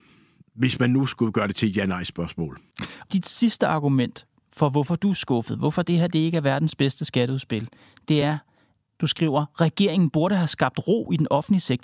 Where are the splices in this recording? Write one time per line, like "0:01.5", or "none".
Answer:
none

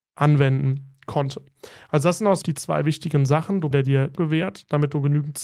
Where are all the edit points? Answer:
0:02.4
0:03.7
0:04.1

